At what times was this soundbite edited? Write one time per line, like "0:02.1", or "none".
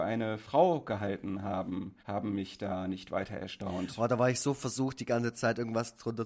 0:02.0